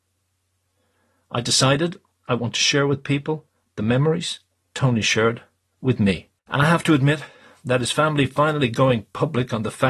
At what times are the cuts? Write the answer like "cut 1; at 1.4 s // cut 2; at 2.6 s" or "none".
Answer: cut 1; at 6.4 s